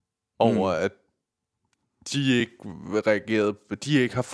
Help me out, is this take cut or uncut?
uncut